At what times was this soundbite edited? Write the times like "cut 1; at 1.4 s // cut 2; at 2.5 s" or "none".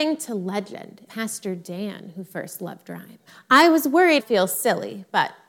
cut 1; at 1.1 s // cut 2; at 3.3 s // cut 3; at 4.2 s